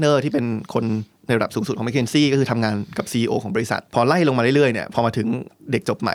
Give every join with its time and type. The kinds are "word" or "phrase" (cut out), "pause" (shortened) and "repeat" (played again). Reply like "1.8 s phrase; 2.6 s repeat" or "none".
3.9 s pause

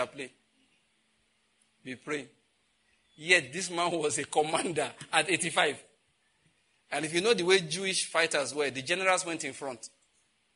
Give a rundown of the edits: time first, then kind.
none

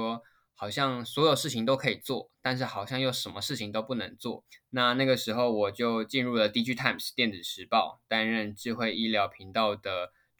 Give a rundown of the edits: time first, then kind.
4.5 s pause

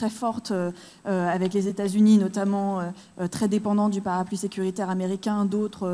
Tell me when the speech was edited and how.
none

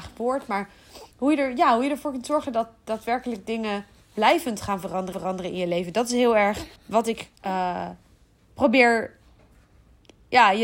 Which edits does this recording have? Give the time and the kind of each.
1.1 s pause; 5.1 s repeat; 6.8 s pause; 7.4 s pause

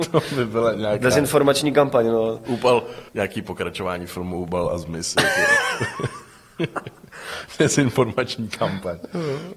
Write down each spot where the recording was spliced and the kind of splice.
3.1 s pause

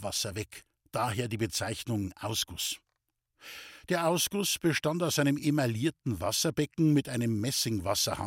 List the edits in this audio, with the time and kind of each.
none

